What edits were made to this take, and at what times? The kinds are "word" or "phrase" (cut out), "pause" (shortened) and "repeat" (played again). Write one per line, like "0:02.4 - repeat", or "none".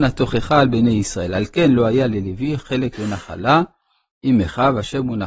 none

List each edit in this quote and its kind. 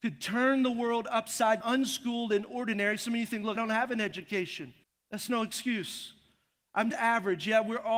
0:01.6 - word
0:03.6 - word
0:04.8 - pause
0:06.9 - word

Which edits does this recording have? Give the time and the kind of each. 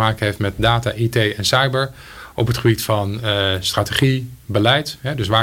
none

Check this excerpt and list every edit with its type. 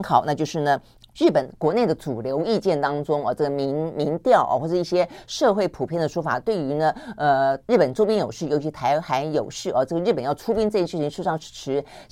0:00.9 - pause
0:07.6 - pause

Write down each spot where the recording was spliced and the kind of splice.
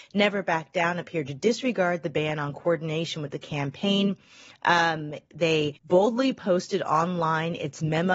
0:05.8 - pause

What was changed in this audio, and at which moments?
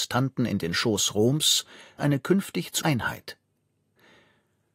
0:02.0 - word
0:02.8 - word

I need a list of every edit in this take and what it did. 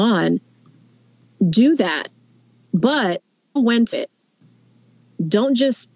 0:03.6 - word
0:03.9 - word

